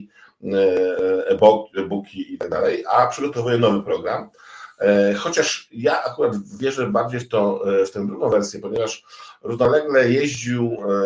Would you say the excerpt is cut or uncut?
uncut